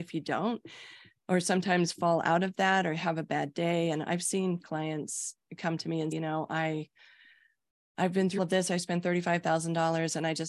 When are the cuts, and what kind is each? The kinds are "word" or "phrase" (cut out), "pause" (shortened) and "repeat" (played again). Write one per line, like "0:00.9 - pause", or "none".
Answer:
0:04.6 - word
0:06.1 - word
0:08.4 - word